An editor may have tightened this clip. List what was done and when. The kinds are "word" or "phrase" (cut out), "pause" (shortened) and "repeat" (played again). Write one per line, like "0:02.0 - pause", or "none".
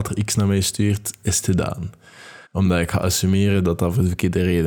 0:02.5 - pause